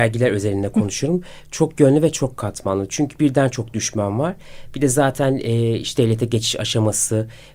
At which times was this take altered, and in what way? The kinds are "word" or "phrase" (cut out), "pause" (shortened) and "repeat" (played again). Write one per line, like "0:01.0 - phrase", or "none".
0:06.0 - word